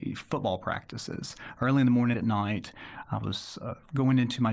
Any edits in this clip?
yes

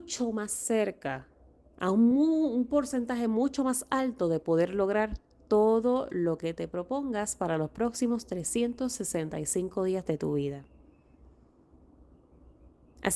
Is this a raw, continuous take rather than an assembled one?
yes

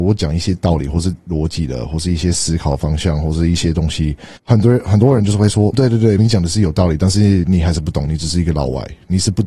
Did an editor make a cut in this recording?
yes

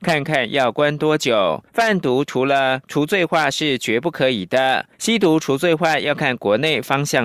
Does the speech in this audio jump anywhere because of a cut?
yes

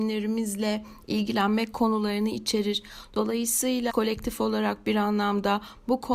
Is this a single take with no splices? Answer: no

